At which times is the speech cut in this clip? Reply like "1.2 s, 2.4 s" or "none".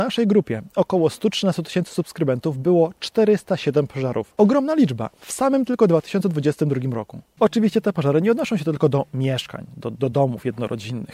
none